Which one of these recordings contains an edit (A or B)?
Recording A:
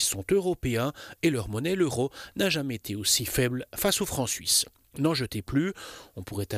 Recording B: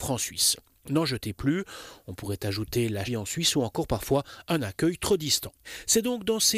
B